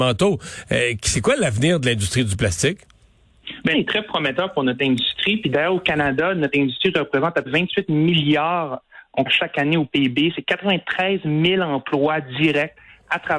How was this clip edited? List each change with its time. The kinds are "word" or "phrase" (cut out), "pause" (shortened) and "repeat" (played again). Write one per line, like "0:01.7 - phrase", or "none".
0:03.7 - word
0:07.5 - word
0:09.3 - word